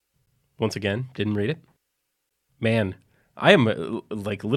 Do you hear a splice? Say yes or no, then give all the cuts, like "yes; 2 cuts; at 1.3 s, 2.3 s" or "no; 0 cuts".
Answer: no; 0 cuts